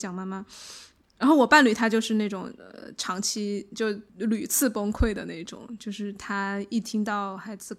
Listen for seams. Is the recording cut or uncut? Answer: cut